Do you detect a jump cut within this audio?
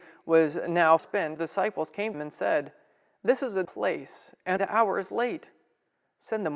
yes; 5 cuts; at 1.0 s, 1.4 s, 2.1 s, 3.6 s, 4.6 s

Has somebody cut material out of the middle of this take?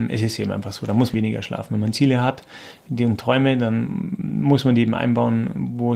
yes; 1 cut; at 1.1 s

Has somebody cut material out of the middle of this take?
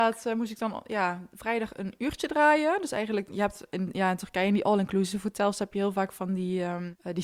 no; 0 cuts

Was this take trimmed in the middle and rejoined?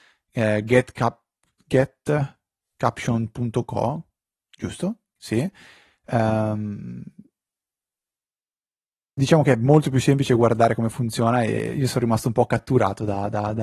no; 0 cuts

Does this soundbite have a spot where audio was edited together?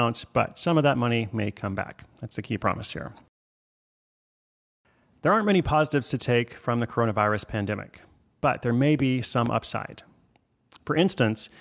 no; 0 cuts

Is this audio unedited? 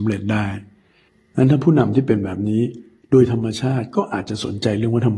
yes; 0 cuts

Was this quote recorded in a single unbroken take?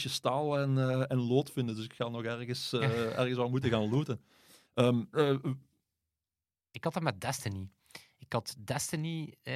yes; 0 cuts

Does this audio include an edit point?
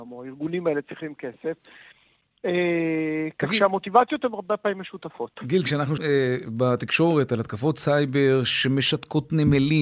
yes; 1 cut; at 6.0 s

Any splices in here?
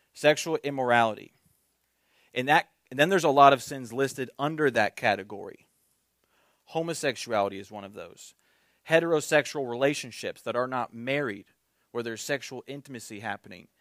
no; 0 cuts

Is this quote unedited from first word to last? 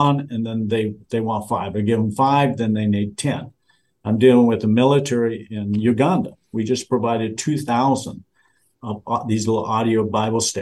yes; 0 cuts

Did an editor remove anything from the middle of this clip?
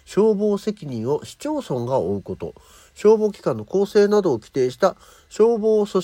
no; 0 cuts

